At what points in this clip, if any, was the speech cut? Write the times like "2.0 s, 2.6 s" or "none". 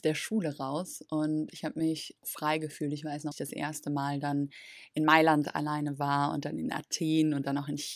2.2 s, 3.3 s

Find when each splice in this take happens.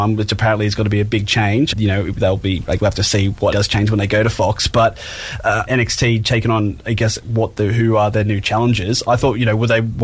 1.7 s, 2.8 s, 3.5 s, 5.7 s

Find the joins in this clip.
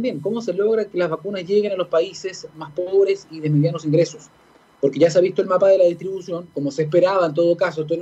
none

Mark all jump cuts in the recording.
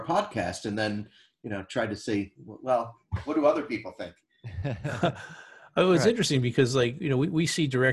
none

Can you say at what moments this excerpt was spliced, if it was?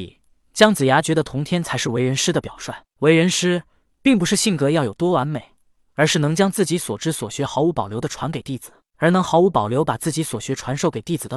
none

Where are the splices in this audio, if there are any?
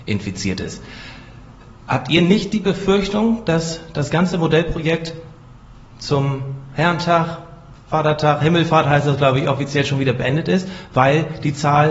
none

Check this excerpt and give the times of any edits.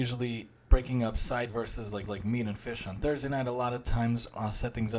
1.5 s, 2.1 s

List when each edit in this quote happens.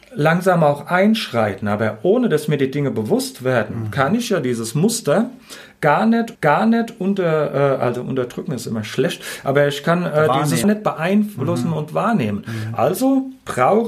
6.3 s, 10.6 s

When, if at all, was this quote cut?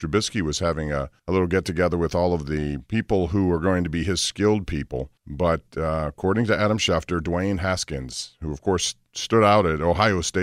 1.2 s, 5.2 s

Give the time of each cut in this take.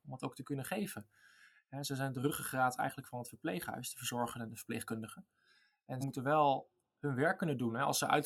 6.0 s

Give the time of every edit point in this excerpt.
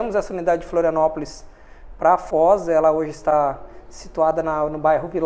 none

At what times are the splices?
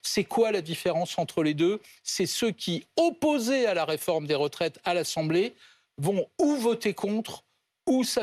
none

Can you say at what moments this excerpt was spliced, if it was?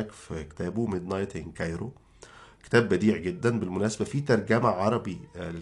none

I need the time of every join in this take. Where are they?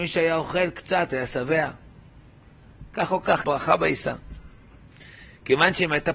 3.4 s

